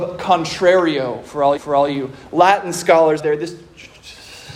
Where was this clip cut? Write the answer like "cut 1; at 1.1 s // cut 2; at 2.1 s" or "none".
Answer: cut 1; at 1.6 s // cut 2; at 3.2 s